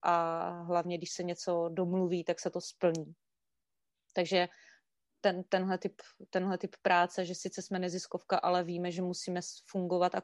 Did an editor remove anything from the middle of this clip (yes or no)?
no